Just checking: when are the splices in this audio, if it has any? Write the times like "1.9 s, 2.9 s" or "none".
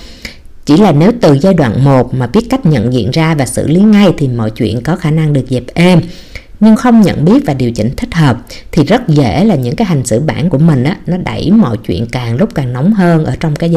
6.7 s, 10.5 s